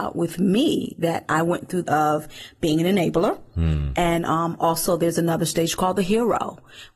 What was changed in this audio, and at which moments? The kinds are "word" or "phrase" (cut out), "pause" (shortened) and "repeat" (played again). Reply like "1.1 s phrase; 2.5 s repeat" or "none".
1.8 s phrase